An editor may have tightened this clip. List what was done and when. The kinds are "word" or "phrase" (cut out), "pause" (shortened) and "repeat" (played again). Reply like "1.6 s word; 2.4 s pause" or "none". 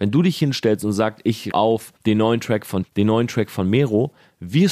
1.5 s word; 2.0 s pause; 2.8 s word